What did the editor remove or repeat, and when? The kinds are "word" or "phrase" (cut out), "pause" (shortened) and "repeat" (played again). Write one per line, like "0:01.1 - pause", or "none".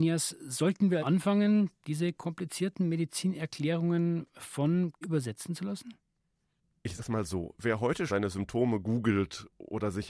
0:01.0 - word
0:05.0 - word
0:07.0 - word
0:08.1 - word